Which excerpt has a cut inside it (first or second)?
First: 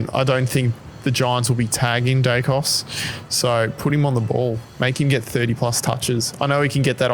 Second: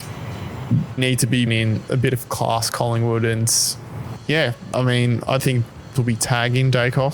second